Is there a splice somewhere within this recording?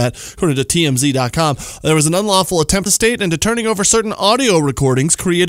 yes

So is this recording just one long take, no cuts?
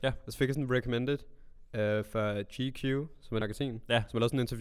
no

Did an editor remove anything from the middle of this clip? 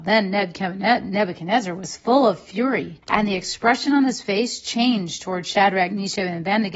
yes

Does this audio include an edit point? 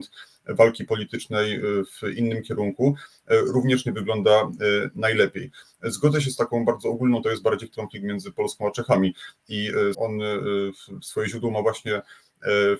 yes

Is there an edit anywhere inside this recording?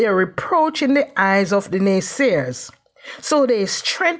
no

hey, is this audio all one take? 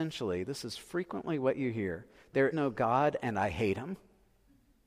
no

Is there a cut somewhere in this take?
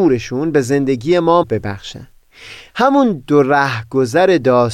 yes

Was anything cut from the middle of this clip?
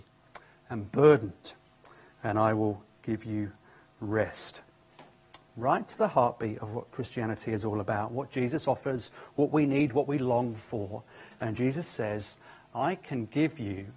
no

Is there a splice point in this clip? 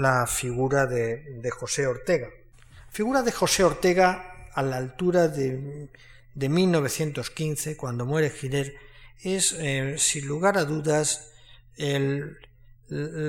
no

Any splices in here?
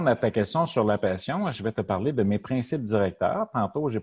no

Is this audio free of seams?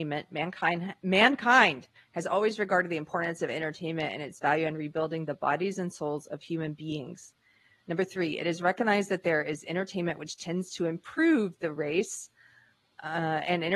yes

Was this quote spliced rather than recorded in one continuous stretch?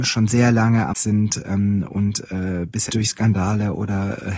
yes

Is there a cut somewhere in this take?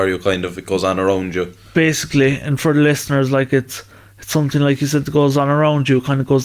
no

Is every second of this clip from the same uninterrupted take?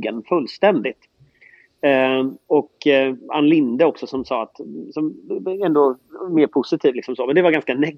yes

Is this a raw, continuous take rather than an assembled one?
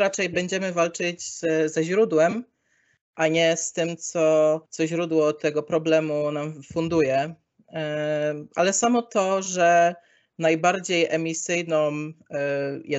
no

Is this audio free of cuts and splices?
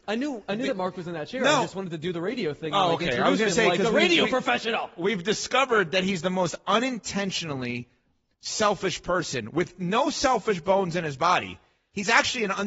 yes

